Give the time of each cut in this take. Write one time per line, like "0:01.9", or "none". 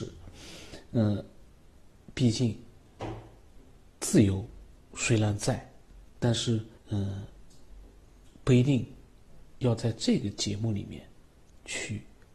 0:04.7
0:06.8